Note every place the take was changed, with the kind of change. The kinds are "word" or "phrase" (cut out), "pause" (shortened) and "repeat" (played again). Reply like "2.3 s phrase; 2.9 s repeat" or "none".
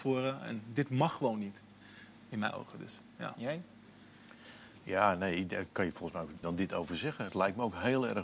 6.4 s phrase